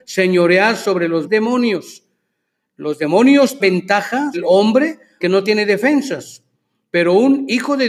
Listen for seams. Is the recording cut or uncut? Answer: cut